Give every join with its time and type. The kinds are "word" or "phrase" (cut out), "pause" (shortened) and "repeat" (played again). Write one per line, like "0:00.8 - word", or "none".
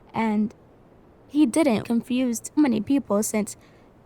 0:01.8 - word
0:02.6 - word